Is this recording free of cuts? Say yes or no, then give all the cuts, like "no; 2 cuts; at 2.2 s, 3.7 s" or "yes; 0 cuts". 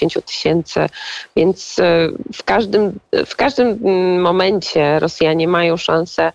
yes; 0 cuts